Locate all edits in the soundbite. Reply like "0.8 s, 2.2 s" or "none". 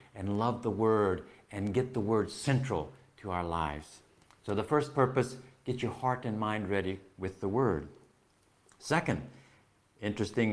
none